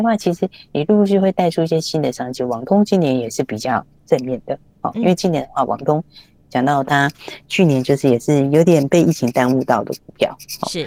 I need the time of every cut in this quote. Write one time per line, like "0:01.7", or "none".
none